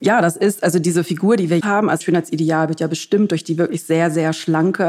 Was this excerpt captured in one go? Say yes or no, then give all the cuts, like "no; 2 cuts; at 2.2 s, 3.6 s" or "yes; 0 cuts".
no; 2 cuts; at 1.6 s, 2.0 s